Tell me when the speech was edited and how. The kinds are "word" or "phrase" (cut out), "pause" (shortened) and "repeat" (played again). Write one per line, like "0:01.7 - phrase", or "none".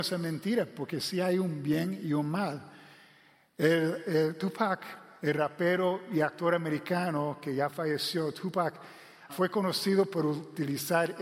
0:09.3 - word